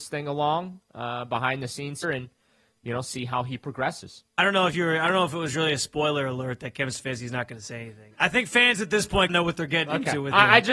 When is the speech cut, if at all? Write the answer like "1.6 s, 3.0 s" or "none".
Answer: 2.0 s, 4.3 s, 9.3 s